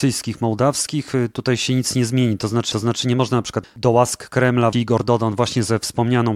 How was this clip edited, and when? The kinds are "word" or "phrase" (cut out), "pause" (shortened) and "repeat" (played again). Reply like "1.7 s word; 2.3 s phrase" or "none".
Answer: 2.7 s repeat; 3.6 s phrase; 4.7 s word